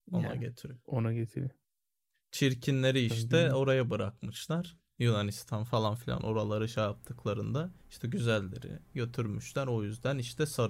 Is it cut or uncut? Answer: cut